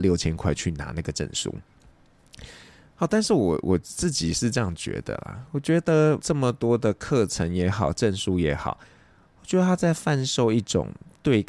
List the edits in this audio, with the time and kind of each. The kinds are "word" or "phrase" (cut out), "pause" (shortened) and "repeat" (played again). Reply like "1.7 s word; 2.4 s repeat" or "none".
6.2 s word